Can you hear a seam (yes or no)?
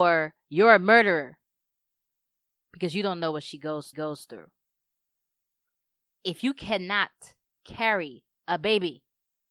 yes